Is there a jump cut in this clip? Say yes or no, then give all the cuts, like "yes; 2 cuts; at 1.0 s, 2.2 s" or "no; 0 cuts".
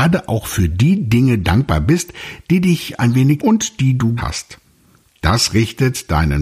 yes; 2 cuts; at 3.4 s, 4.2 s